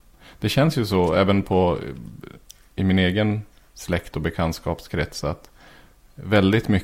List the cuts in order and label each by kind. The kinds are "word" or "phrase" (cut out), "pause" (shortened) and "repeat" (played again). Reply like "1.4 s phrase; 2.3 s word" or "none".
none